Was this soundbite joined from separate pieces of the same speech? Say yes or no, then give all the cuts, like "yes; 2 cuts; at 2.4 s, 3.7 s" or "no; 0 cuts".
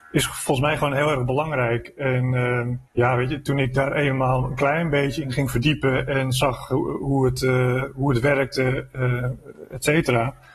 yes; 1 cut; at 2.9 s